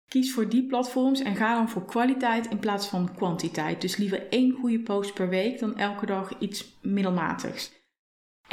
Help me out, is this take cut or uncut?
uncut